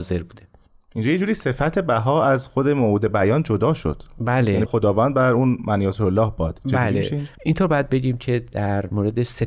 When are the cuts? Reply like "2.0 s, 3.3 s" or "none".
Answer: 4.7 s